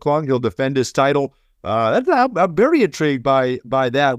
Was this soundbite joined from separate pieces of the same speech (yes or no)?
no